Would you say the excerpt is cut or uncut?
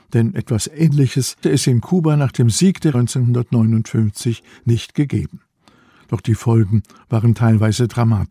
cut